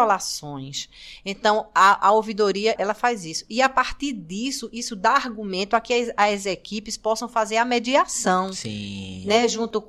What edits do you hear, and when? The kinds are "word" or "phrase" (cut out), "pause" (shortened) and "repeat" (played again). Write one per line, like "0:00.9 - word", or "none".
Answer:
0:02.8 - word